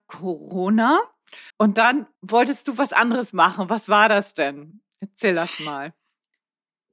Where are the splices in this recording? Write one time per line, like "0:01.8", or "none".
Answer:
0:01.5
0:02.2